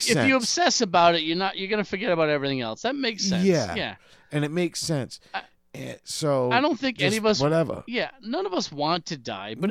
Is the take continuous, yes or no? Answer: yes